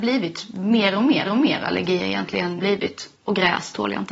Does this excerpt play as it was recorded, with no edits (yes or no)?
no